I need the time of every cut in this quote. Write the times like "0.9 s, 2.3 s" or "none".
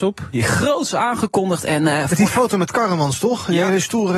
none